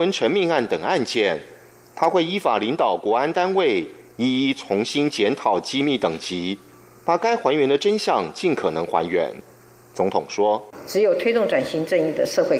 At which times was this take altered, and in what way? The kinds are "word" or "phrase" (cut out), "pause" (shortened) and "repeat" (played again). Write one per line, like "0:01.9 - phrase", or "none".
none